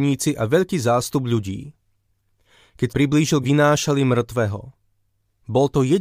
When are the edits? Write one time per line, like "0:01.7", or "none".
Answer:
0:02.9
0:03.4